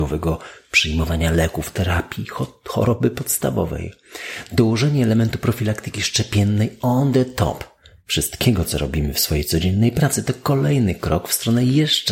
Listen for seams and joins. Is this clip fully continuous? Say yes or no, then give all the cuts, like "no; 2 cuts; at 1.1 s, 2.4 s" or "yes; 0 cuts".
yes; 0 cuts